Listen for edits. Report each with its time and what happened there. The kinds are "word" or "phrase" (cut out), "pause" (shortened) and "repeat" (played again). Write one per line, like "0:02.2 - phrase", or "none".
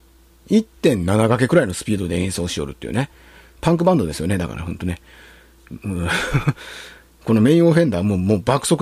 none